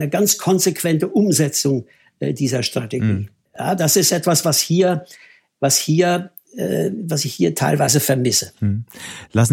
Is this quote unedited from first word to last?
yes; 0 cuts

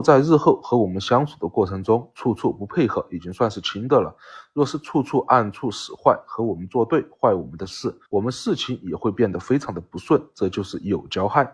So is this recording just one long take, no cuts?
no; 1 cut; at 8.1 s

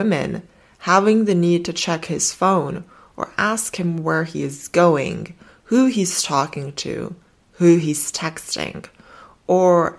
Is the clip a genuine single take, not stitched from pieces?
yes; 0 cuts

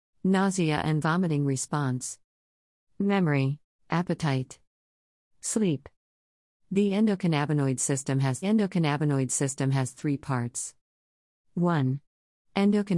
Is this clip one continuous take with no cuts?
no; 2 cuts; at 3.7 s, 8.4 s

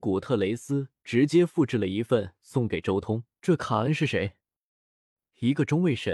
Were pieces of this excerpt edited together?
yes; 1 cut; at 3.3 s

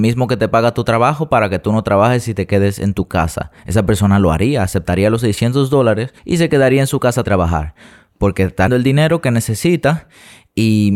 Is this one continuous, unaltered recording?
no; 4 cuts; at 3.6 s, 6.2 s, 7.2 s, 8.7 s

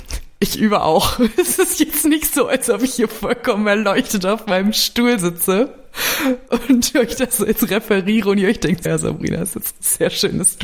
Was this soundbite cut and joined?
yes; 1 cut; at 8.9 s

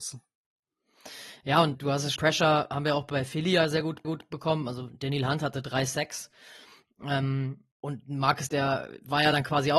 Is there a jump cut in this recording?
yes; 5 cuts; at 1.7 s, 2.2 s, 4.0 s, 7.7 s, 8.5 s

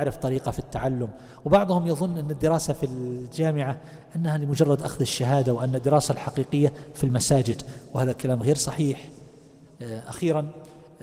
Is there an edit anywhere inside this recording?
no; 0 cuts

